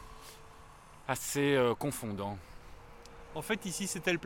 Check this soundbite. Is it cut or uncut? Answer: uncut